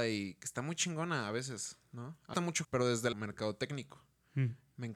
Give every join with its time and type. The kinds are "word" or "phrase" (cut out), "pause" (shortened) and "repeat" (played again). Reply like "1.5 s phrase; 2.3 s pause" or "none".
2.3 s phrase; 2.6 s word; 3.1 s word